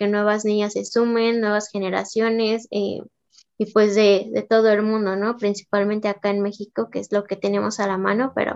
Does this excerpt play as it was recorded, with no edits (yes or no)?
yes